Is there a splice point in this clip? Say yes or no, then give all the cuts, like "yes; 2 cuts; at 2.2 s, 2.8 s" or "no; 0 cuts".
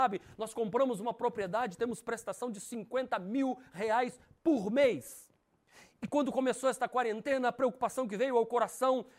no; 0 cuts